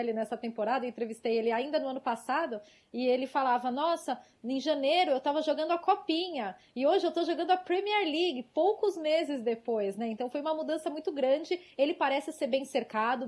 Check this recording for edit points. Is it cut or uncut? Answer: uncut